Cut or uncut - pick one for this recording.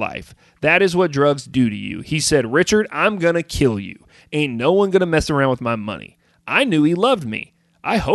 uncut